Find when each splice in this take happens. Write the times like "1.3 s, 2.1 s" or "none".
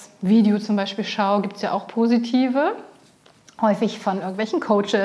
none